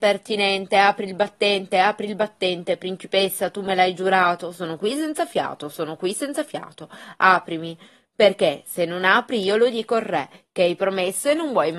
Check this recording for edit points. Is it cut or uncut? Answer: uncut